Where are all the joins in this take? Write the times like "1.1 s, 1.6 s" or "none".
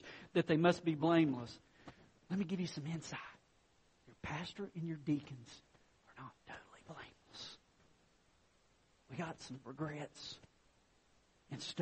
none

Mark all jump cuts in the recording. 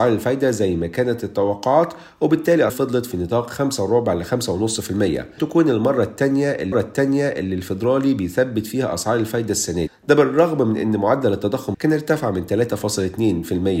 2.7 s, 5.4 s, 6.7 s, 9.9 s, 11.7 s

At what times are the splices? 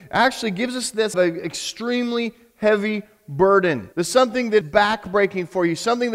1.1 s, 3.9 s, 4.6 s

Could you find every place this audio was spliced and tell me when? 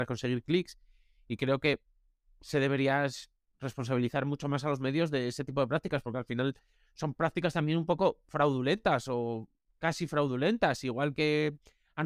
none

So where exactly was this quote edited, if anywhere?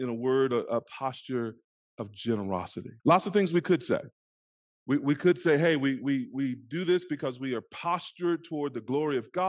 3.0 s

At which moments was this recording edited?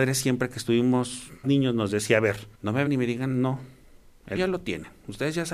1.4 s, 2.5 s, 2.9 s, 4.4 s

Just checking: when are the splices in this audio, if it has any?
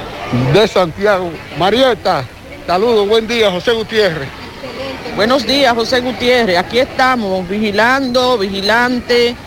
none

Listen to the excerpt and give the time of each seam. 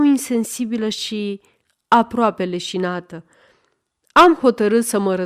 none

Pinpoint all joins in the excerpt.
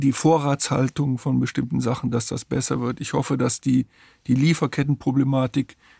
none

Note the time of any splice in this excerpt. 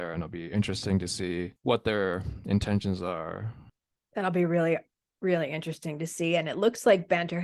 none

